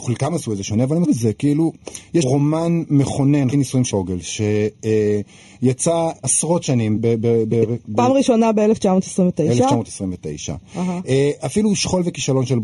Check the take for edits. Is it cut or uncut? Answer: cut